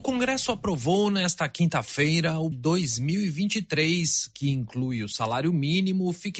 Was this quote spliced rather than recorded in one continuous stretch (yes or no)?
yes